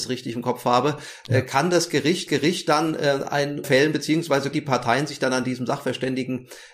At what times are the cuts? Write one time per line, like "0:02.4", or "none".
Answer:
0:02.3
0:03.6
0:04.5